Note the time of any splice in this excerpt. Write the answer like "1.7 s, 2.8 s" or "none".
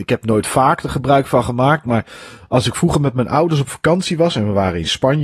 none